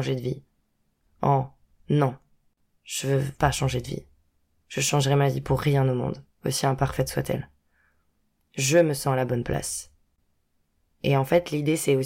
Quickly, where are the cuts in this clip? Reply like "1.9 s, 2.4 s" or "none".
none